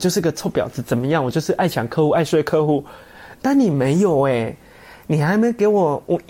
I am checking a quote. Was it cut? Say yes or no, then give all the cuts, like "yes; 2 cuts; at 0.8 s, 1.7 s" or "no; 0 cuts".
no; 0 cuts